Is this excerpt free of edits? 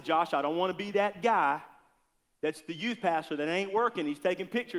yes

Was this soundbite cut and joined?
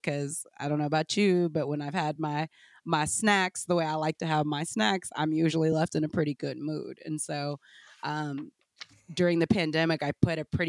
no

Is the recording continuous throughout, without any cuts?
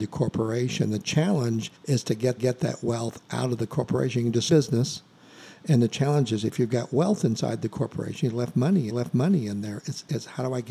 no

